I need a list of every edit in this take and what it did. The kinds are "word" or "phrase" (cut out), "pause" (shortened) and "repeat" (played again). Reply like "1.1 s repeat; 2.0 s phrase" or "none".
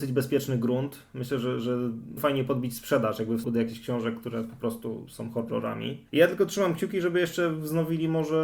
2.2 s phrase; 3.4 s word; 6.1 s pause

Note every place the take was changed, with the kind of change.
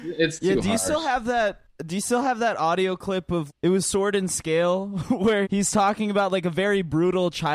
3.5 s word; 5.4 s word

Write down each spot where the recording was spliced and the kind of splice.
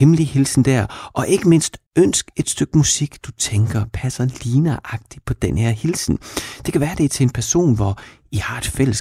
1.9 s pause

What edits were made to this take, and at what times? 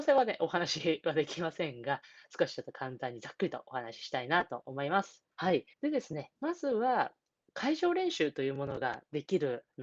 5.3 s pause; 5.7 s pause; 7.2 s pause

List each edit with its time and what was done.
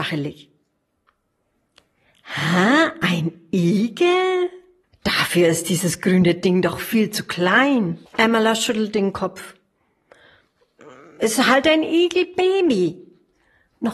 4.8 s pause; 8.1 s pause

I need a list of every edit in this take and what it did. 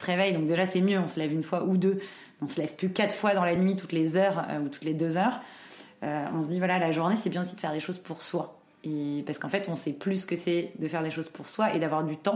none

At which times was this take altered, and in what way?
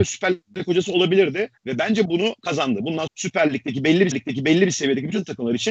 1.6 s pause; 2.0 s phrase; 3.1 s phrase; 4.1 s repeat

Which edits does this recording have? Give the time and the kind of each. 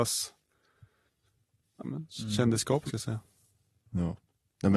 1.8 s word; 2.9 s word

